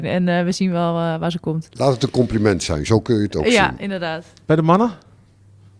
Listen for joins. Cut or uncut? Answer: uncut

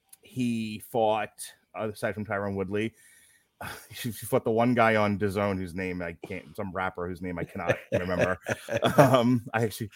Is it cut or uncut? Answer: uncut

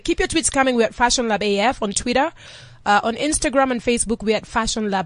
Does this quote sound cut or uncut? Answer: uncut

